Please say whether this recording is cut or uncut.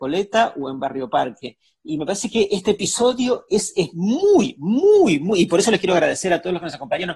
uncut